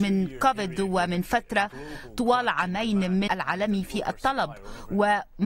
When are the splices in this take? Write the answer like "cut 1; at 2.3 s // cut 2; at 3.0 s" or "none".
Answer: cut 1; at 3.3 s